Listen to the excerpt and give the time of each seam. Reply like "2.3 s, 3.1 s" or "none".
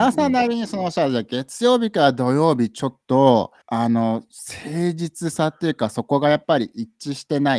3.6 s